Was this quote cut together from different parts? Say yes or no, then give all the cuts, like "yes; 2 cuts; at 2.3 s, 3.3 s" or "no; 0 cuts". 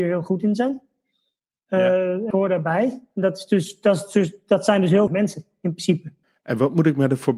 yes; 3 cuts; at 2.3 s, 5.1 s, 6.2 s